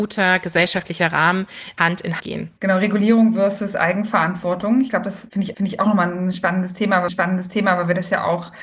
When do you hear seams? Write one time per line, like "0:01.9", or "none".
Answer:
0:01.8
0:02.2
0:02.6
0:05.5
0:07.1

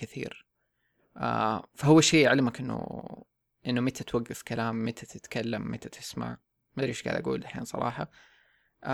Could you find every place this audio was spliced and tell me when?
none

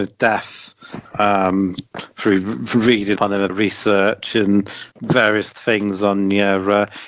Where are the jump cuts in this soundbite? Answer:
0:01.9
0:03.2
0:03.5
0:04.9
0:05.5

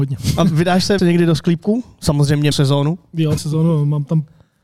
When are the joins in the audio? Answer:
0:01.0
0:02.5
0:03.4

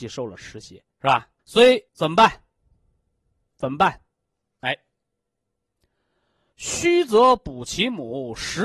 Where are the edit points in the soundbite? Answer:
0:00.9
0:01.4
0:01.9

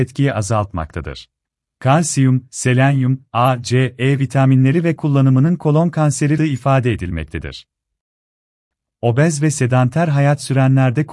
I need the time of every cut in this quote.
0:01.4
0:05.0
0:06.4

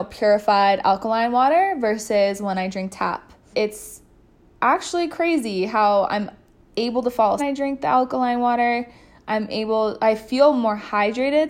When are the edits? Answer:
0:03.5
0:07.4

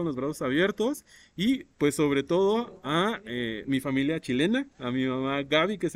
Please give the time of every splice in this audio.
0:01.7

